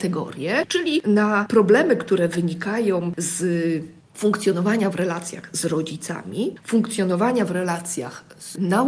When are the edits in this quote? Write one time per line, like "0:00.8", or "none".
none